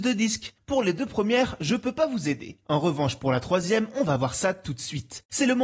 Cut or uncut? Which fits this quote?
uncut